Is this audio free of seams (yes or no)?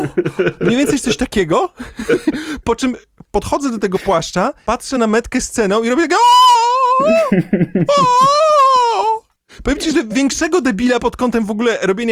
yes